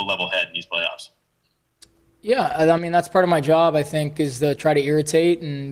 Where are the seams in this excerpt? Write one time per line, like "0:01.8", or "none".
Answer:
none